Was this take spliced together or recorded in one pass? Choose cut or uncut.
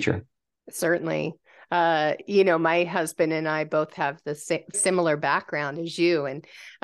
cut